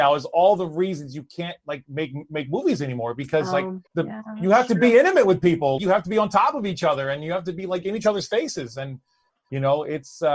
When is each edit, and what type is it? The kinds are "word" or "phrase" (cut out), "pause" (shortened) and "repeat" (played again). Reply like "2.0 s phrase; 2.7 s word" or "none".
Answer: 3.9 s pause; 5.8 s word